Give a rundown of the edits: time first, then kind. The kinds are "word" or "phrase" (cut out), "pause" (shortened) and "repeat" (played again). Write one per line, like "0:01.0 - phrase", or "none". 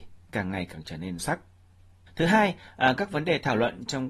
0:01.2 - word